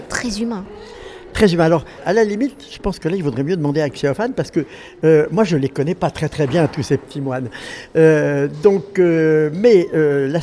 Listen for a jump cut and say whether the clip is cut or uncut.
uncut